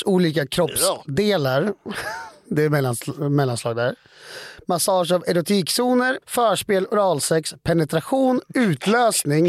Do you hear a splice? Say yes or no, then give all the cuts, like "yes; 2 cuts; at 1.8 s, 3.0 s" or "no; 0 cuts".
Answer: yes; 1 cut; at 6.2 s